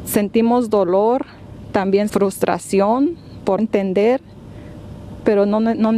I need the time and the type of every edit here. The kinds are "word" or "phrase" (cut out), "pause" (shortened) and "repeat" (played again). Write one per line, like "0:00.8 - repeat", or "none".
0:02.1 - word
0:03.6 - word